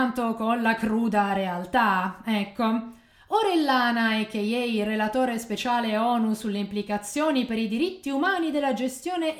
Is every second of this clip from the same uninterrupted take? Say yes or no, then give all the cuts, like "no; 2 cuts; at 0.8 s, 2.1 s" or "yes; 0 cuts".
yes; 0 cuts